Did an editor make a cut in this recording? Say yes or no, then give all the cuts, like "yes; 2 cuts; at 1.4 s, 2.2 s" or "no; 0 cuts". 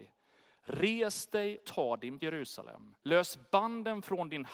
yes; 3 cuts; at 1.6 s, 2.2 s, 3.0 s